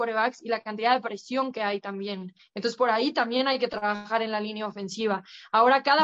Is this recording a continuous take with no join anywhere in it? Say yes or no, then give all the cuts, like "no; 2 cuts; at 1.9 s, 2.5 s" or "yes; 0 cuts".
yes; 0 cuts